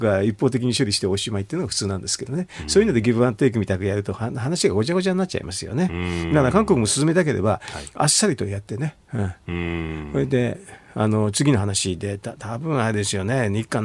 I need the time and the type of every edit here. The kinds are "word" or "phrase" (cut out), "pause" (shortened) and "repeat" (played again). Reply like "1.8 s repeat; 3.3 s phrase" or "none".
9.0 s pause